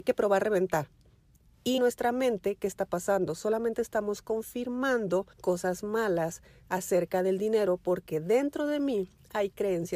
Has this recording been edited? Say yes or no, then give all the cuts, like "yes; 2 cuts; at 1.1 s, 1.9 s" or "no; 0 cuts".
yes; 2 cuts; at 1.8 s, 5.3 s